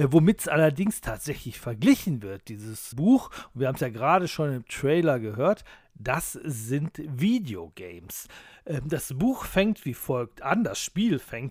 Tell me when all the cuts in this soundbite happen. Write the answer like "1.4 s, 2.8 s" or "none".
2.9 s